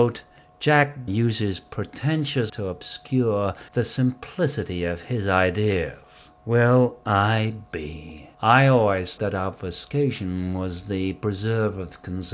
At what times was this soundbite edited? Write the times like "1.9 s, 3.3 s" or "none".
1.1 s, 2.5 s, 3.7 s, 6.4 s, 8.3 s, 9.2 s